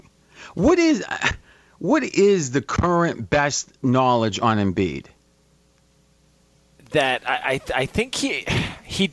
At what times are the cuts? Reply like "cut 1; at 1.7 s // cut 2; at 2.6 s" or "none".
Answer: none